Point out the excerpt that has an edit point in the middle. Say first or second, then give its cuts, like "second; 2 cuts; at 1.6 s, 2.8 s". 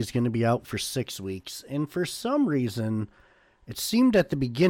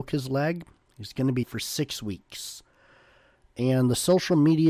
second; 1 cut; at 1.4 s